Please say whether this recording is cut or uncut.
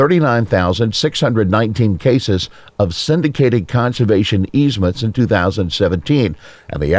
uncut